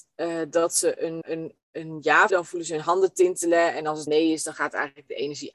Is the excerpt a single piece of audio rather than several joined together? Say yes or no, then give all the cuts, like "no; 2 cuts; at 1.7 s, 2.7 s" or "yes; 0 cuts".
no; 3 cuts; at 1.2 s, 2.3 s, 4.1 s